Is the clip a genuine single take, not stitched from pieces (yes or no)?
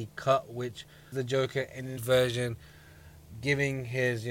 no